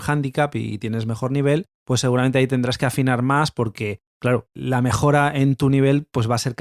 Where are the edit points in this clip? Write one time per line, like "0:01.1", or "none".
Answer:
0:01.7
0:04.1